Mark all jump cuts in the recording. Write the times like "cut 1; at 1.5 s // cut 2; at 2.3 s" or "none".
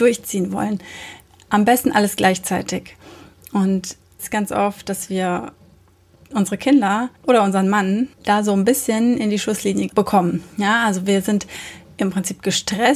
cut 1; at 4.2 s // cut 2; at 7.2 s // cut 3; at 8.1 s